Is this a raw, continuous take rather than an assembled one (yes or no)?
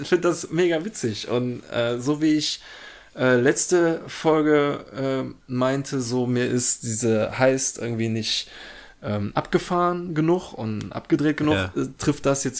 yes